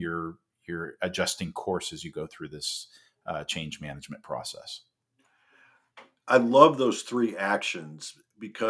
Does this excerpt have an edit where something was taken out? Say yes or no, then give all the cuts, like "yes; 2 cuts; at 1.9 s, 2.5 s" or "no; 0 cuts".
no; 0 cuts